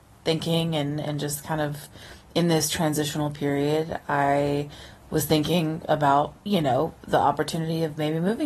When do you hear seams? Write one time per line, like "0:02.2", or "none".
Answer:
0:06.4